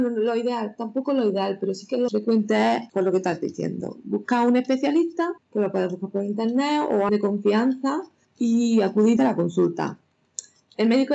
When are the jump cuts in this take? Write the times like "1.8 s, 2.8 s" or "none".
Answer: 2.1 s, 2.9 s, 5.4 s, 7.1 s, 8.2 s, 9.2 s